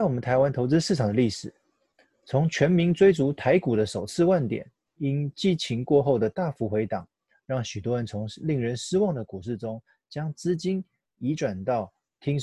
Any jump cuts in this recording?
no; 0 cuts

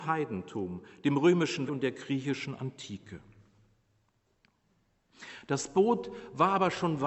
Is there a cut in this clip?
yes; 1 cut; at 1.7 s

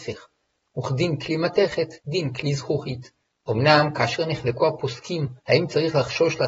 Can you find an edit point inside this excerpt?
yes; 3 cuts; at 2.0 s, 3.4 s, 5.4 s

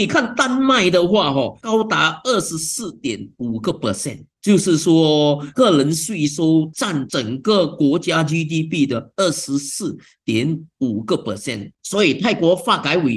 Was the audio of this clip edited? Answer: no; 0 cuts

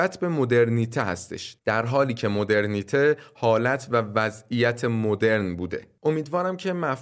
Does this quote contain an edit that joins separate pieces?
no; 0 cuts

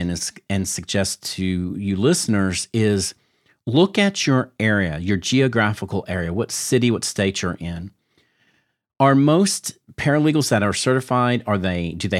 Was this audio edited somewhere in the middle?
no; 0 cuts

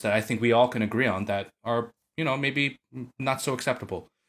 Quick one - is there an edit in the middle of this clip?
no; 0 cuts

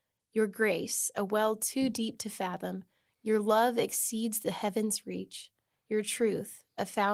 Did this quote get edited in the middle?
no; 0 cuts

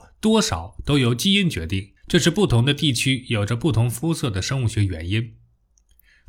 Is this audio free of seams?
no; 1 cut; at 2.0 s

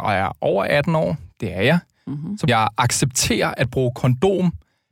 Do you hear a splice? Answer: yes; 1 cut; at 2.5 s

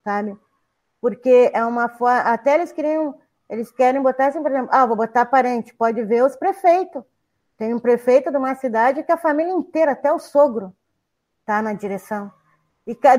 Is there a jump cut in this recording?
no; 0 cuts

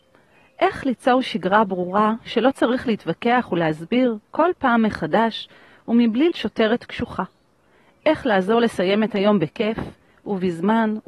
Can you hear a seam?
yes; 1 cut; at 6.3 s

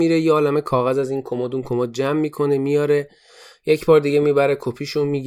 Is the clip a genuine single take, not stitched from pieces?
yes; 0 cuts

